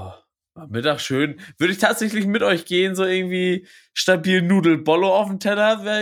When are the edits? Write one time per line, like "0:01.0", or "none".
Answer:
none